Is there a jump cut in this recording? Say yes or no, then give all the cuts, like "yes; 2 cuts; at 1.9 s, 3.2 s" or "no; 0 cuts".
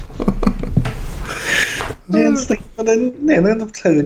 no; 0 cuts